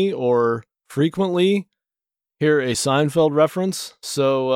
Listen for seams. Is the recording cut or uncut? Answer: uncut